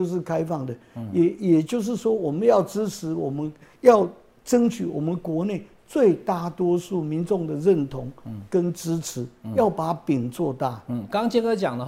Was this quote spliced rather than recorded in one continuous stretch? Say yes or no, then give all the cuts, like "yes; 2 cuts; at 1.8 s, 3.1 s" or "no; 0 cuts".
no; 0 cuts